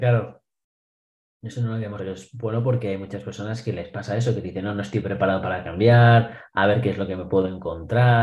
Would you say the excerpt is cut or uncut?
cut